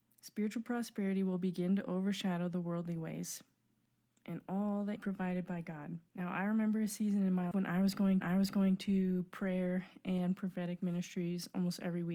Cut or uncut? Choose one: cut